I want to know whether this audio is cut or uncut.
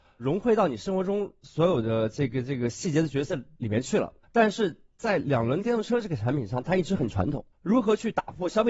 cut